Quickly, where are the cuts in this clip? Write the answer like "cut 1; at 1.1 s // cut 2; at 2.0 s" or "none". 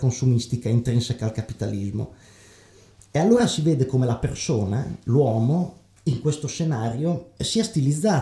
none